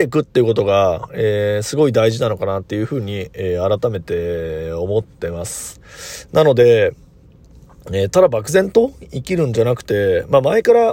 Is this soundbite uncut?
yes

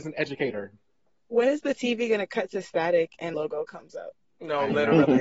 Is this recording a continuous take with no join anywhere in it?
no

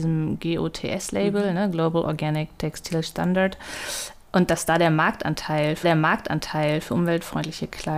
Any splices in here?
yes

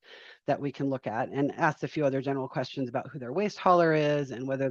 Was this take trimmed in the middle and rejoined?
no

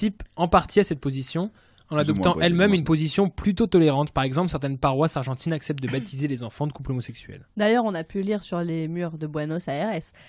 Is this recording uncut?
yes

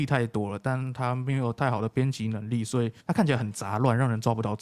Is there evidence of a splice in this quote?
yes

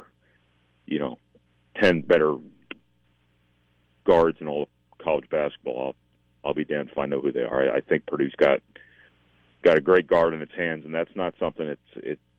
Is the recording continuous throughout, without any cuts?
yes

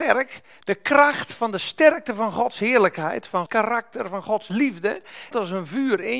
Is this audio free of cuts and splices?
no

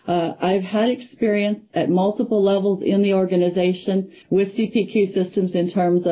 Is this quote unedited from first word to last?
no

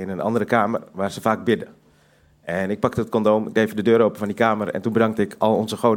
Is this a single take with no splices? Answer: yes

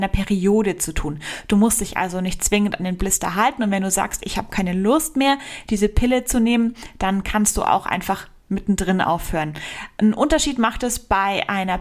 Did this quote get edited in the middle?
no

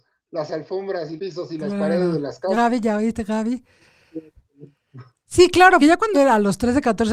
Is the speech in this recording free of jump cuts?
no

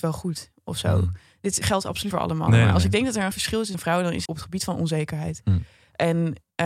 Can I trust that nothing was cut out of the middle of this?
no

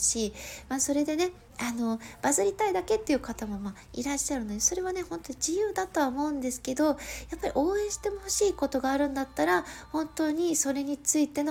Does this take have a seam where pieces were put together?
yes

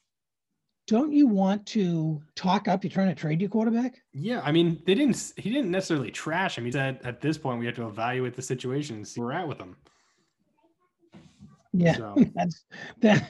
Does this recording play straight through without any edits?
no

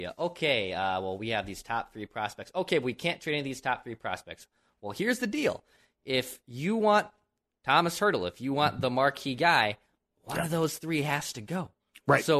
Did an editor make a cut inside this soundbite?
no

